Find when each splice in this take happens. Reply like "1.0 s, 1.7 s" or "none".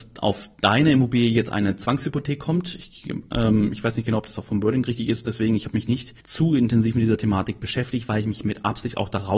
6.2 s